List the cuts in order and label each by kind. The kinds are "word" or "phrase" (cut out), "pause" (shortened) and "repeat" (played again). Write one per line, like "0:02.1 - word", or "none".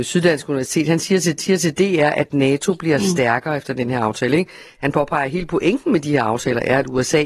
0:01.4 - repeat